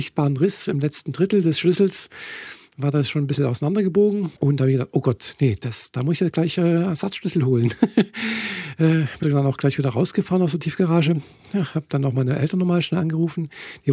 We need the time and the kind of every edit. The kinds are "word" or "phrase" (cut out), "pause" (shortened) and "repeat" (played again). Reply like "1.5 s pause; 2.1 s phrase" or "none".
4.4 s pause; 9.2 s word